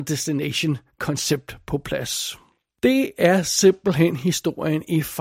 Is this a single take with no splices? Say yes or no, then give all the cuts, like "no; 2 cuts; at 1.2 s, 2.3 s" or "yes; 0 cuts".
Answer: yes; 0 cuts